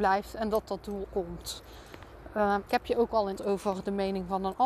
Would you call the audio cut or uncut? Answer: cut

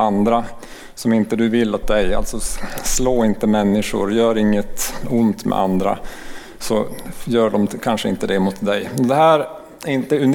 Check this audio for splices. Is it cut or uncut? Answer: cut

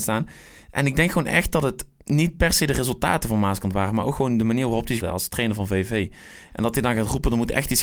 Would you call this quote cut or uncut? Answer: cut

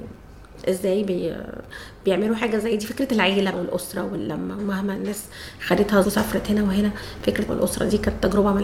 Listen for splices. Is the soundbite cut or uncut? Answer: cut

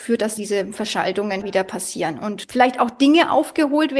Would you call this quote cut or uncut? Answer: cut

